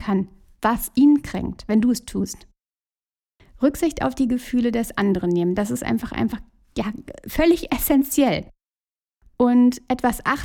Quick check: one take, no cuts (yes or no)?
yes